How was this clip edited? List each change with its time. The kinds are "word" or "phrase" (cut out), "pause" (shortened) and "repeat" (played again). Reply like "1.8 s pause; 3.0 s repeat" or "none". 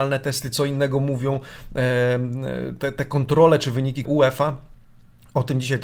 4.0 s word